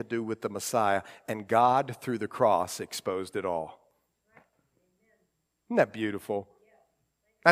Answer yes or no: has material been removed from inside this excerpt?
no